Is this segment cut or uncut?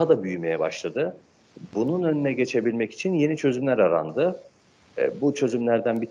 uncut